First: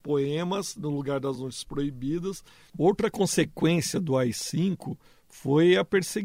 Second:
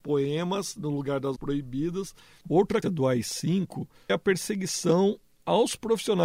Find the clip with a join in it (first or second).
second